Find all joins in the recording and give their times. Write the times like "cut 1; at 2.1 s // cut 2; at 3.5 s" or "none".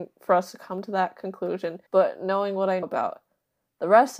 cut 1; at 1.9 s // cut 2; at 2.8 s